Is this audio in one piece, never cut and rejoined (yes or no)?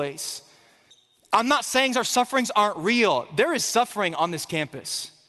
no